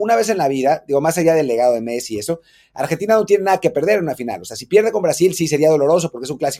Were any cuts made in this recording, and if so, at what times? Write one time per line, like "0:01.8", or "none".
none